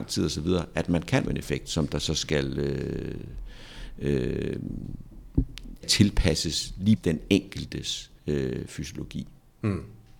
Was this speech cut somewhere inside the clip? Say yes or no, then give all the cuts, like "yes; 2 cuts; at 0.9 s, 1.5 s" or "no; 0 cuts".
yes; 4 cuts; at 1.3 s, 5.8 s, 7.0 s, 8.2 s